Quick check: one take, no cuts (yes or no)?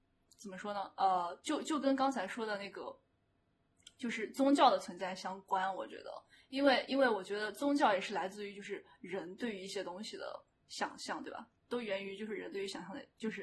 yes